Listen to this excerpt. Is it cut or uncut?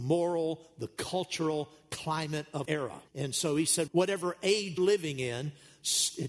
cut